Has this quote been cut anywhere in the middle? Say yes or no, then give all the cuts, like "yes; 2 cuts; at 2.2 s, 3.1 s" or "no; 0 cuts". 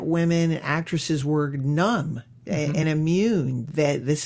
no; 0 cuts